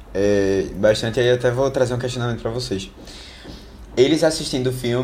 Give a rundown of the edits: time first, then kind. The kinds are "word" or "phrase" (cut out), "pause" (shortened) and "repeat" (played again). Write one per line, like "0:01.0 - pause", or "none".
none